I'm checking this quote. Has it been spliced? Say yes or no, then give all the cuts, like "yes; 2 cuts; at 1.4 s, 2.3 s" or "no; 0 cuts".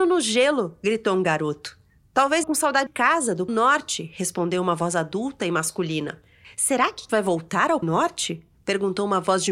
yes; 5 cuts; at 2.4 s, 2.9 s, 3.5 s, 7.1 s, 7.8 s